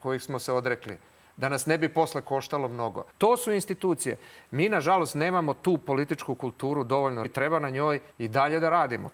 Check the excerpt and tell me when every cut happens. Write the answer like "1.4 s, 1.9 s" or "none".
3.1 s, 7.2 s, 8.1 s